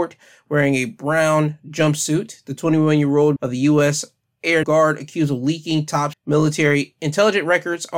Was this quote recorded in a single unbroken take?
no; 3 cuts; at 3.4 s, 4.6 s, 6.1 s

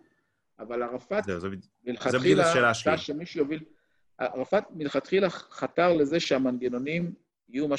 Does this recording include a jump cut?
no; 0 cuts

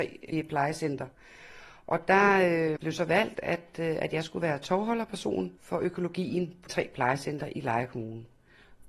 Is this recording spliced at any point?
yes; 3 cuts; at 2.8 s, 5.6 s, 6.7 s

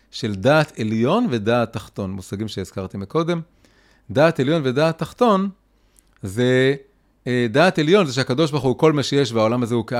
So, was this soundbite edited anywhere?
no; 0 cuts

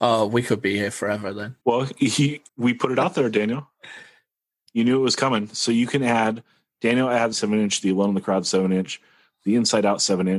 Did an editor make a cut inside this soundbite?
yes; 3 cuts; at 1.6 s, 2.5 s, 7.3 s

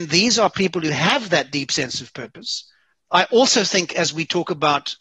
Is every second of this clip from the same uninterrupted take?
yes; 0 cuts

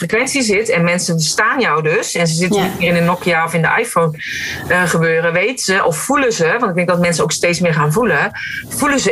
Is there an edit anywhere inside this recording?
no; 0 cuts

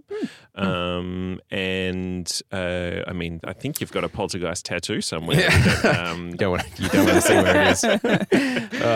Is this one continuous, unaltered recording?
no; 2 cuts; at 3.4 s, 6.4 s

